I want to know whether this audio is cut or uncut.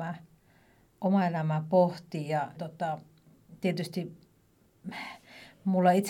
cut